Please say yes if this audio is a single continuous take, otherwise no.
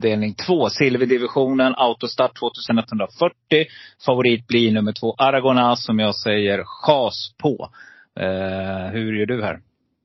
yes